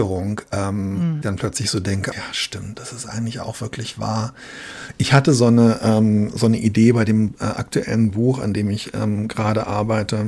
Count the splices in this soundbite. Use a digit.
3